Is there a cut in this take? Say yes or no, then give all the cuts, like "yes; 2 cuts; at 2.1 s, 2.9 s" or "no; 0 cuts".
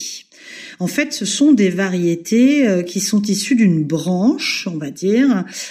no; 0 cuts